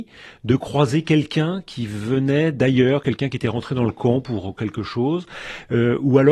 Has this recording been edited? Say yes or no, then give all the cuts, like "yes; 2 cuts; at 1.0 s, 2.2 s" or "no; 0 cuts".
no; 0 cuts